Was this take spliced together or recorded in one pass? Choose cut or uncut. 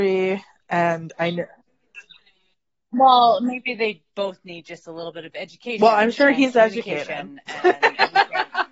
uncut